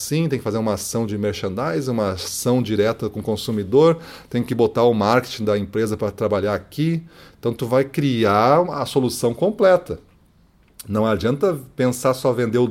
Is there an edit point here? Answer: no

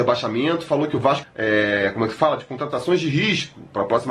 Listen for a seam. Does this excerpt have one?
yes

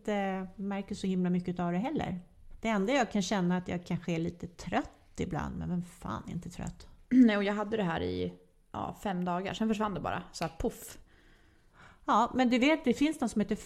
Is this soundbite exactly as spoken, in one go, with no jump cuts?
yes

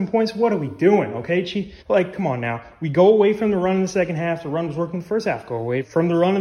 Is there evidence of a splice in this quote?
yes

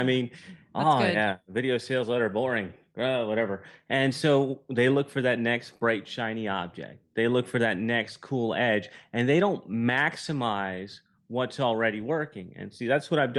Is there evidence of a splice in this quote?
no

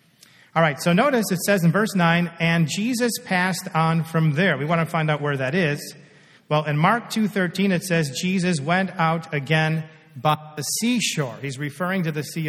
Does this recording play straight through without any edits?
yes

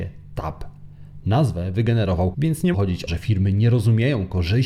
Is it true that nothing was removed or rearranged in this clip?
no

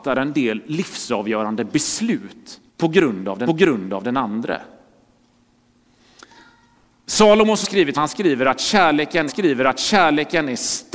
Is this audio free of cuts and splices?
no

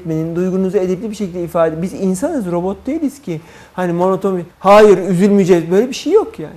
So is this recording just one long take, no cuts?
no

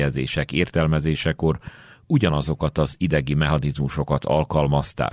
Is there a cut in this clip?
no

